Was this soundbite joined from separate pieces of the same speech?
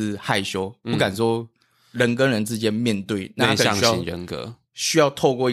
no; 0 cuts

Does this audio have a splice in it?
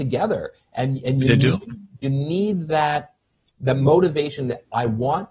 no; 0 cuts

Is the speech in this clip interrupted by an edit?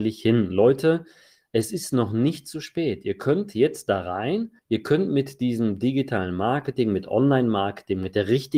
yes; 1 cut; at 4.6 s

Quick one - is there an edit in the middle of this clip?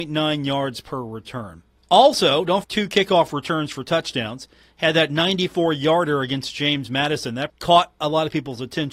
yes; 2 cuts; at 2.6 s, 7.5 s

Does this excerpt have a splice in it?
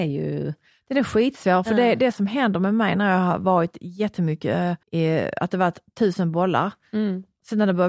yes; 1 cut; at 4.8 s

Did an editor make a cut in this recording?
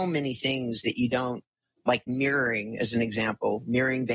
no; 0 cuts

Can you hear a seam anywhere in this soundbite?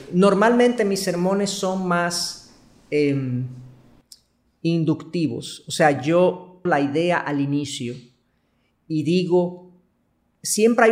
yes; 1 cut; at 6.7 s

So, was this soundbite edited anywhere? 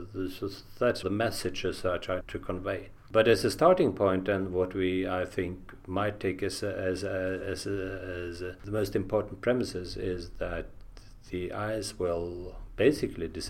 yes; 2 cuts; at 1.0 s, 2.2 s

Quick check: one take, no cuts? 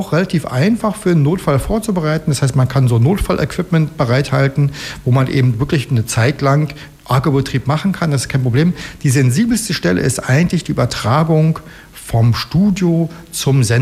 yes; 0 cuts

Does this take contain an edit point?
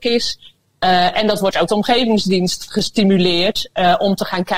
yes; 1 cut; at 1.7 s

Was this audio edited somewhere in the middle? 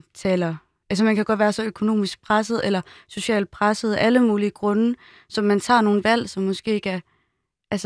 no; 0 cuts

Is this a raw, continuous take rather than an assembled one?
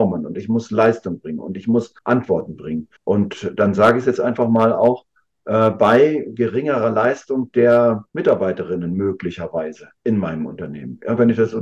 no; 4 cuts; at 2.0 s, 3.0 s, 8.1 s, 10.0 s

